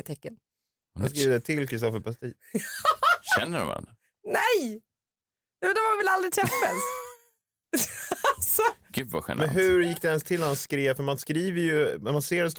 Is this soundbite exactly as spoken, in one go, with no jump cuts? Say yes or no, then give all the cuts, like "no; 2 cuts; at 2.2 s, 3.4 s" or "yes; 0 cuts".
yes; 0 cuts